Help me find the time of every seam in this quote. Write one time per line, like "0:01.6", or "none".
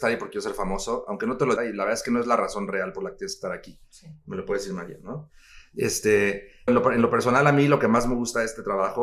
0:01.6
0:06.7